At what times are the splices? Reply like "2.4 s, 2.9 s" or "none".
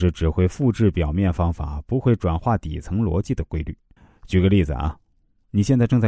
4.0 s